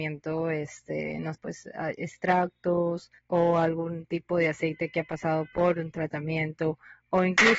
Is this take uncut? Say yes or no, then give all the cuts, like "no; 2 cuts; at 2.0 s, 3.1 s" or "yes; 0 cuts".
no; 2 cuts; at 1.3 s, 3.2 s